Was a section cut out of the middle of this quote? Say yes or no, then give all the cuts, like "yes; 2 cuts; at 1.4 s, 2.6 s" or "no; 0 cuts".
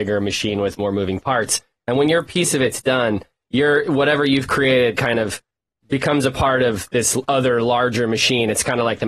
no; 0 cuts